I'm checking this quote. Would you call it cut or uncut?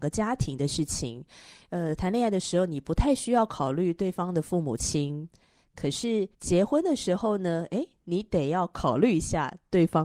cut